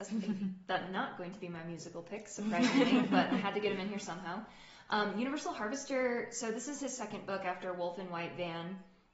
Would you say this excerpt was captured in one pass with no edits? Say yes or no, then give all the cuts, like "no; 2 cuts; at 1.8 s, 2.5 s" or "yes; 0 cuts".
yes; 0 cuts